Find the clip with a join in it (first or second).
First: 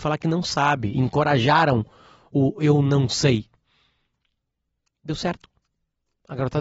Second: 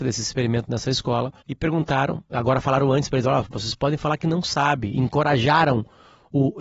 second